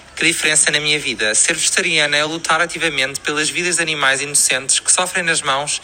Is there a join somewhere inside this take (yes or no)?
no